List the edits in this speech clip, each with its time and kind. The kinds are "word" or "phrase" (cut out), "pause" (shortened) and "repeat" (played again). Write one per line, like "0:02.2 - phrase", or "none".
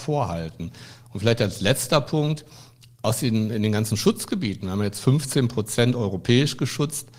none